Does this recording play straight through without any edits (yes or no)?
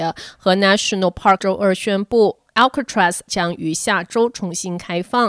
no